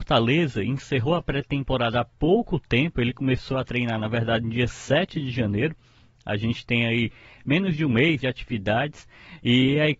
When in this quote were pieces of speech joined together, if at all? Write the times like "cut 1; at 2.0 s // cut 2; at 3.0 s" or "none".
cut 1; at 8.2 s